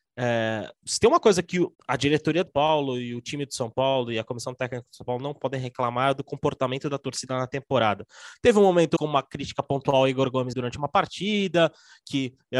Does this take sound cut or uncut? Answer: cut